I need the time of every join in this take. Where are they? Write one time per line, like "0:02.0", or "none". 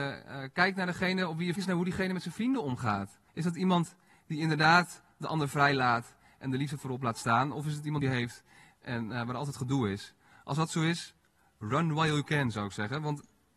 0:01.6
0:03.3
0:08.0